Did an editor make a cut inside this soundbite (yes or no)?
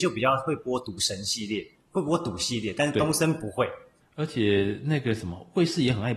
yes